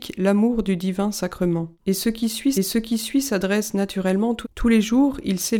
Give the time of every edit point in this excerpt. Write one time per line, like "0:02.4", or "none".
0:01.8
0:02.5
0:04.4